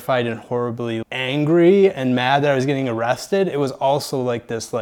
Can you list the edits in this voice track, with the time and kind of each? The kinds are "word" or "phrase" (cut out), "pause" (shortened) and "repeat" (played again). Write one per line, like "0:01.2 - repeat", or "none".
0:01.0 - word